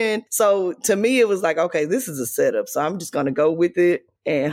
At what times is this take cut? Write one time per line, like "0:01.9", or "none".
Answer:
none